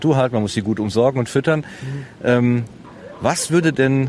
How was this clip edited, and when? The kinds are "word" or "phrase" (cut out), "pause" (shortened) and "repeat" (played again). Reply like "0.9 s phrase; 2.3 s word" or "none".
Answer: none